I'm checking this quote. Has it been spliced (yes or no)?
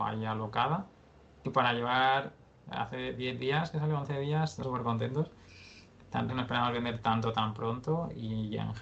yes